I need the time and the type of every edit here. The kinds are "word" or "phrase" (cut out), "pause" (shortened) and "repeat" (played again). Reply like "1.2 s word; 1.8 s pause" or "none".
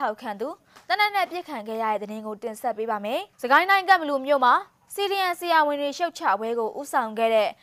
3.3 s pause